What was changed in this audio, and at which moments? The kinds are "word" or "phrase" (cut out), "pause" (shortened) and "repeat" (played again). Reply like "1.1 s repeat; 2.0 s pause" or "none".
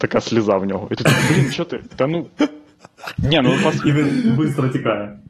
1.5 s phrase